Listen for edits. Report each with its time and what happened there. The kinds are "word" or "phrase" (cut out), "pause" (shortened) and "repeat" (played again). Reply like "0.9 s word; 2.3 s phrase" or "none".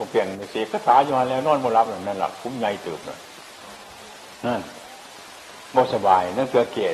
none